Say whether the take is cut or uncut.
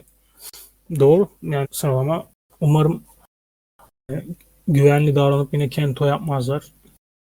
cut